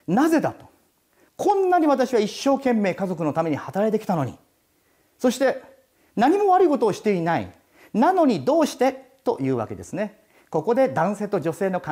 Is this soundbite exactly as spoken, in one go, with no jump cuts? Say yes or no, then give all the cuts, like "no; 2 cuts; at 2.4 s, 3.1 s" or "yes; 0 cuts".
yes; 0 cuts